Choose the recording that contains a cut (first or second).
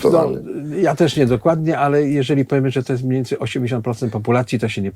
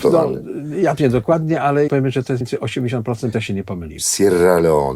second